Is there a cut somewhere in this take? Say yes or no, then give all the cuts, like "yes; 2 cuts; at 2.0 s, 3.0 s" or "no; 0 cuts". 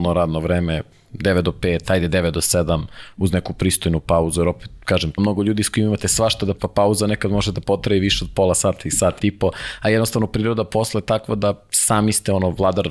yes; 3 cuts; at 5.2 s, 6.6 s, 9.2 s